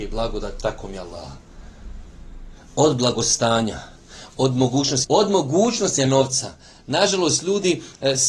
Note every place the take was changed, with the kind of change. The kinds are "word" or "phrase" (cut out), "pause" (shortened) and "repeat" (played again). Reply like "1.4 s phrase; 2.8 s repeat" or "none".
5.0 s phrase; 6.0 s word